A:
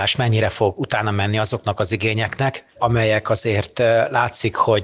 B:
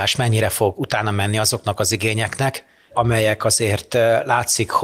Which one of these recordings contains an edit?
A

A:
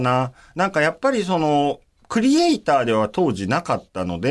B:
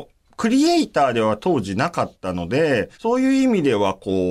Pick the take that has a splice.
B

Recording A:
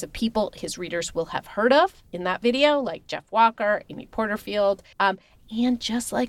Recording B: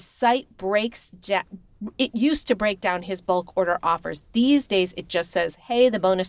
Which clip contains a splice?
A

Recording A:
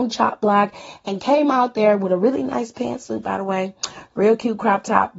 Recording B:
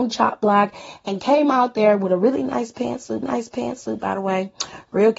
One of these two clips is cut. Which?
B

